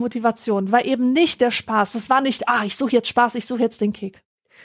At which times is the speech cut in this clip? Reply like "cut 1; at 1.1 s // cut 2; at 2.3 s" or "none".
none